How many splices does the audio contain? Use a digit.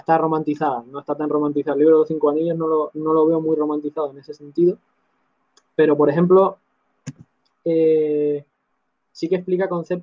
0